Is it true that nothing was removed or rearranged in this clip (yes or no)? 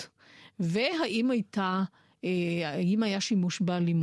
yes